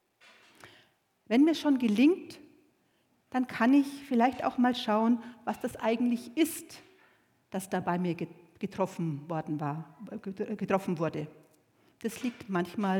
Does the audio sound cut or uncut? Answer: uncut